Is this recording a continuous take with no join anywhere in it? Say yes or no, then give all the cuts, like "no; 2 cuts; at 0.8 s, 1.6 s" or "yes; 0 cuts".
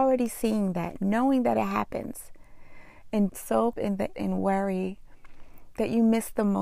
no; 3 cuts; at 3.3 s, 3.7 s, 4.1 s